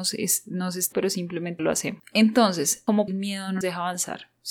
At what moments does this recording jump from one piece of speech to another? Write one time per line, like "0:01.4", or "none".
0:00.9
0:01.6
0:03.1
0:03.6